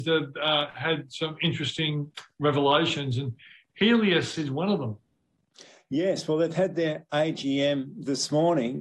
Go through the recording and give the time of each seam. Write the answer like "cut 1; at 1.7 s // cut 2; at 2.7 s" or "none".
none